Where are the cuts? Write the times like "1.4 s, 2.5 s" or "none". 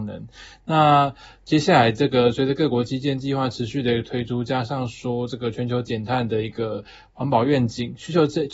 none

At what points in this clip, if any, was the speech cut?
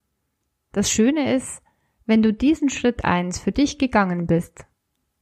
none

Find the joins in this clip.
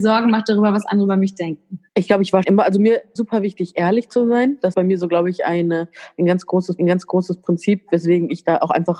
1.9 s, 2.4 s, 3.2 s, 4.7 s, 6.8 s

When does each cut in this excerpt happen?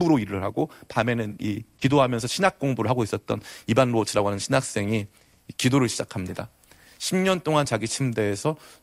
none

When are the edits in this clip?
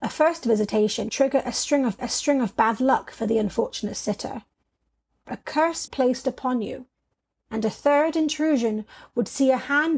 1.1 s, 2.0 s, 5.3 s, 5.9 s

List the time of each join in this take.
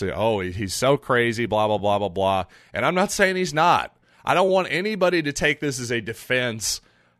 none

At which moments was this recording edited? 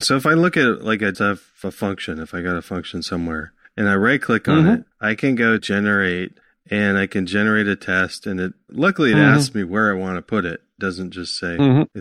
1.1 s, 3.6 s, 4.9 s, 5.6 s, 6.4 s

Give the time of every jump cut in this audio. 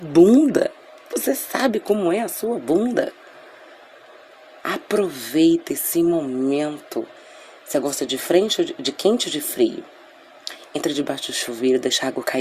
none

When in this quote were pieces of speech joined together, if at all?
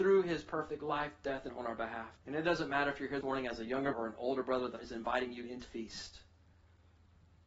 1.5 s, 2.2 s, 3.2 s, 3.9 s, 4.8 s, 5.6 s

